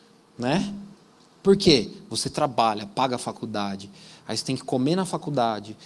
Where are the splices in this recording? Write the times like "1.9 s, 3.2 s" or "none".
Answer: 1.0 s

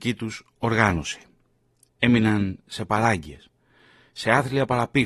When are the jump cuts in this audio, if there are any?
none

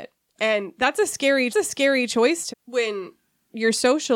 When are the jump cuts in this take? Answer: 1.5 s, 2.5 s

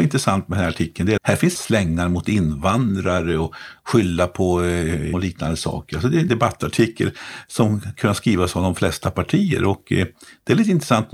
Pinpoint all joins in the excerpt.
1.2 s, 1.5 s, 5.1 s, 6.3 s

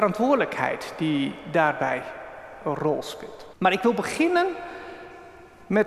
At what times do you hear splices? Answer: 3.5 s

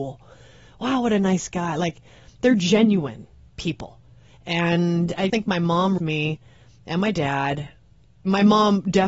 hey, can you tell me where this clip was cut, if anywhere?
5.3 s, 6.0 s

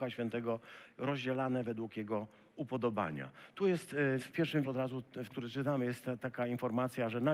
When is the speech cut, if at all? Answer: 4.2 s, 4.6 s, 5.3 s

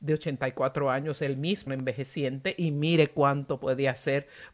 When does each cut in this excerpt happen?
1.7 s

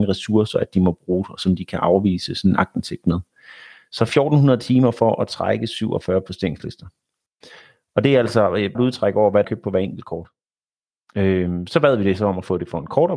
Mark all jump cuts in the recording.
8.7 s, 9.4 s

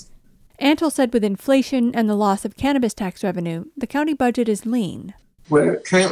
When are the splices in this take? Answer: none

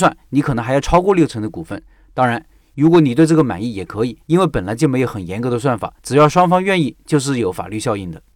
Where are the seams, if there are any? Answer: 4.2 s, 6.0 s

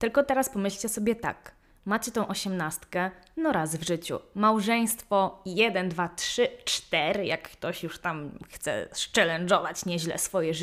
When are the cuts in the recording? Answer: none

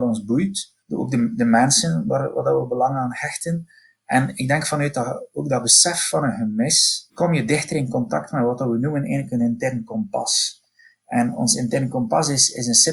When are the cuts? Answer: none

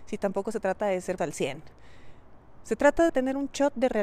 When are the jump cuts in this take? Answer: 1.2 s, 3.1 s

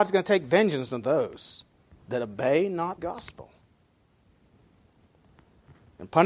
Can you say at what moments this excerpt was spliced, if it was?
3.0 s

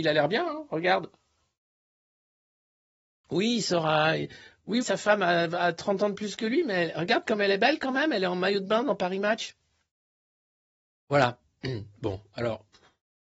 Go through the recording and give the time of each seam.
4.8 s

